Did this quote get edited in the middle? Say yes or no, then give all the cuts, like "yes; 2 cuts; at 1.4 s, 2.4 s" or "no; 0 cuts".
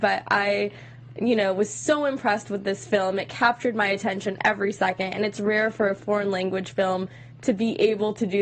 no; 0 cuts